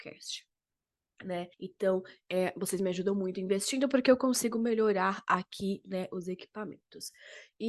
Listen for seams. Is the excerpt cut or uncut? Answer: cut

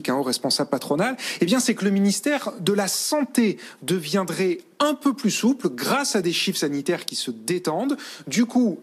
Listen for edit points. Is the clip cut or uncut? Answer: uncut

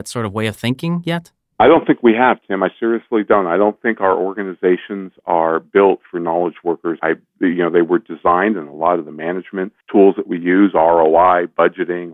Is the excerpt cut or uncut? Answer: cut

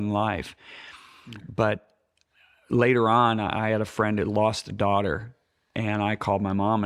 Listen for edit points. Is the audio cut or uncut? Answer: uncut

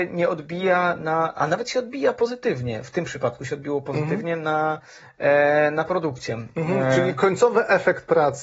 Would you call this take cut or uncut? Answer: uncut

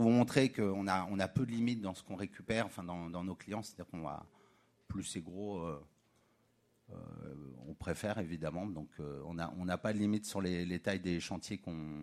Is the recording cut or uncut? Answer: uncut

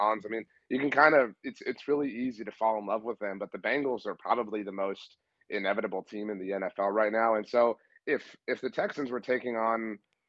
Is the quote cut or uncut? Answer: uncut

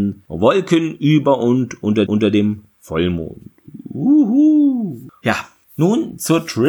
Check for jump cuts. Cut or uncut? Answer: cut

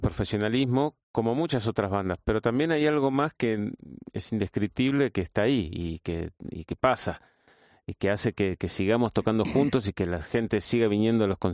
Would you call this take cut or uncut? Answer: uncut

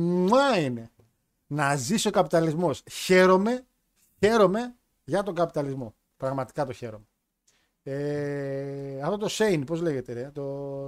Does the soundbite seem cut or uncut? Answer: uncut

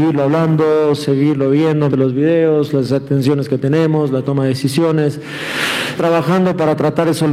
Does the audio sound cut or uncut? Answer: cut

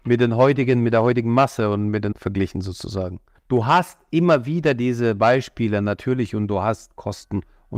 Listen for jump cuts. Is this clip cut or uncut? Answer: cut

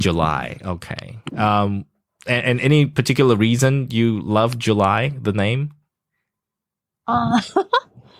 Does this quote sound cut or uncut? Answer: uncut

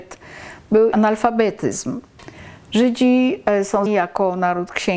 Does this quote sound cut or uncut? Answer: cut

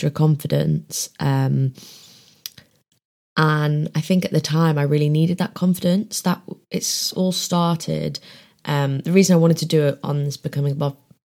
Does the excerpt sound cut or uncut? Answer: uncut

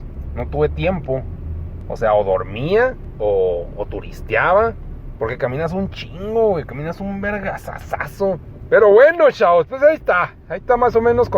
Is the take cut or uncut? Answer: uncut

